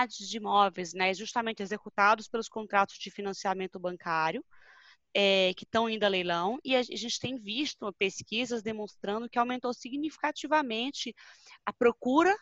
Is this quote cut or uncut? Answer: uncut